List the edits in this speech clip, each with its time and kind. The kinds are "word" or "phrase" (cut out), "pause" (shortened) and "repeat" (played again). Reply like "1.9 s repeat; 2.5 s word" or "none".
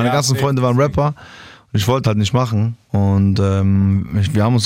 2.0 s word